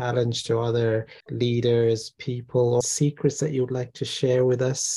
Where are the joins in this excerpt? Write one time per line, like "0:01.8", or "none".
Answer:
0:01.2
0:02.8